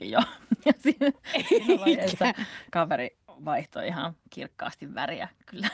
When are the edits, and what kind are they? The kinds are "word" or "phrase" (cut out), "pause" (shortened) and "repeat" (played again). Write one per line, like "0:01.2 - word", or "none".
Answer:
none